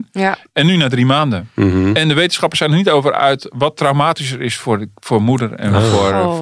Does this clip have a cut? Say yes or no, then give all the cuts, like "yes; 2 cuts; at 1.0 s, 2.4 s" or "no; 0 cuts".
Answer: no; 0 cuts